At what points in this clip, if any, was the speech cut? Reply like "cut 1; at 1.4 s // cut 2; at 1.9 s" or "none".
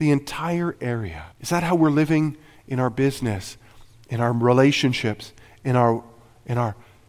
cut 1; at 1.3 s